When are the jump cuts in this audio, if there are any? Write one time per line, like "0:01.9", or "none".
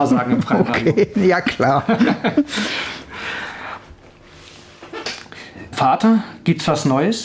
0:05.7